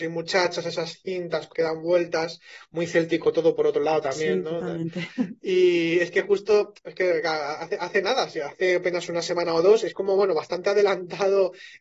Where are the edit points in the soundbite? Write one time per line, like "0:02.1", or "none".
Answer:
0:01.5